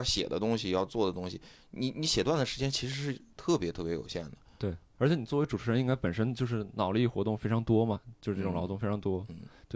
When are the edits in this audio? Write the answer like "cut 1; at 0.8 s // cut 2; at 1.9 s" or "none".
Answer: cut 1; at 4.9 s